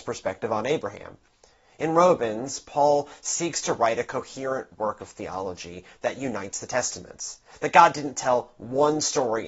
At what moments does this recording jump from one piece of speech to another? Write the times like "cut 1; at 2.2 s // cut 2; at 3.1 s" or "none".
none

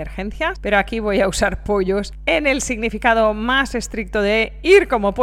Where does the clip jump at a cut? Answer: none

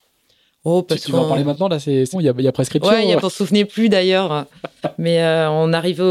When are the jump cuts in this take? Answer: cut 1; at 2.1 s // cut 2; at 3.2 s

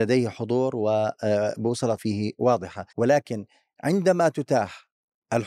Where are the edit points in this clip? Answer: cut 1; at 2.0 s // cut 2; at 2.9 s

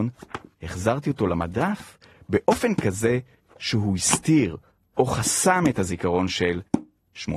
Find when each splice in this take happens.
none

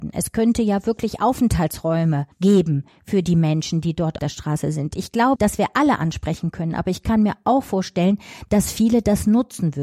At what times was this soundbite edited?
cut 1; at 2.3 s // cut 2; at 4.2 s // cut 3; at 5.4 s

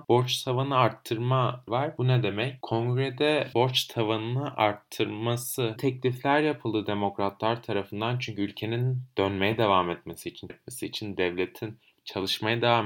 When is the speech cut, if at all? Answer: cut 1; at 1.7 s // cut 2; at 3.5 s // cut 3; at 5.8 s // cut 4; at 10.5 s

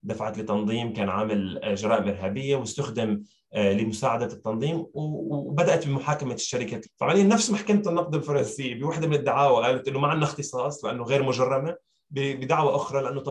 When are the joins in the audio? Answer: cut 1; at 6.8 s

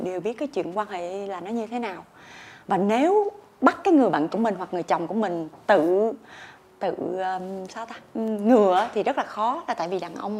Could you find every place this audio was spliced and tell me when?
cut 1; at 4.3 s // cut 2; at 6.6 s

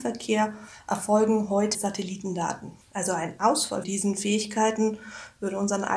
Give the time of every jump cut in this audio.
cut 1; at 1.7 s // cut 2; at 2.8 s // cut 3; at 3.8 s

